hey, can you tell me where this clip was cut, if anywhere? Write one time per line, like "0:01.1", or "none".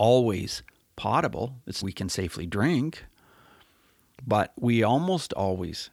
0:01.8